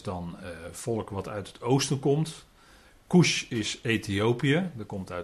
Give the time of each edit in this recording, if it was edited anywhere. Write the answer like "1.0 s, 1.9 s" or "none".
none